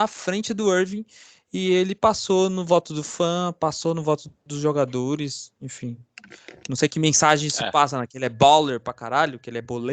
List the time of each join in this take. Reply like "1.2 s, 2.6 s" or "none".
none